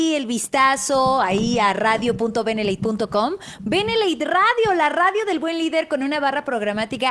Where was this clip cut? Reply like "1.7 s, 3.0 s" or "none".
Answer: none